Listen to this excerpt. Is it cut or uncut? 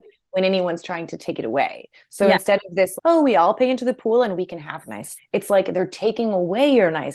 cut